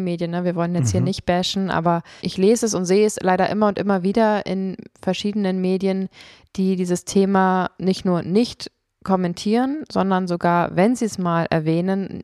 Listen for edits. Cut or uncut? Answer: cut